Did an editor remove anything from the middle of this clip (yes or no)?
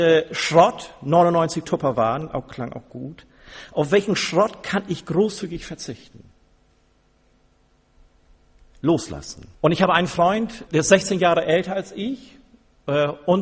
yes